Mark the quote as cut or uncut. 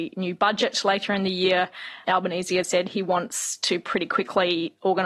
cut